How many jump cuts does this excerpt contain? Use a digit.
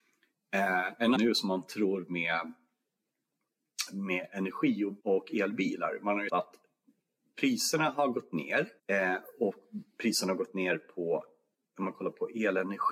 4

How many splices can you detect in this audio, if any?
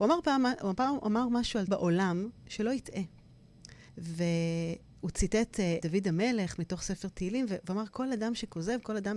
3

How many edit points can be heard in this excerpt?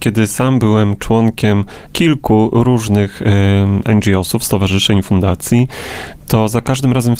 1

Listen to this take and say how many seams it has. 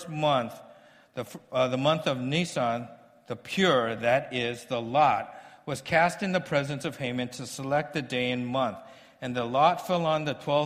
0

